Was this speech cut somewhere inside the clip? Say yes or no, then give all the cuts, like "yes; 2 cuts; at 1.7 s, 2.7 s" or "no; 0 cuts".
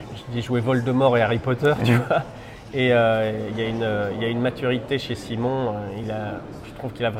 no; 0 cuts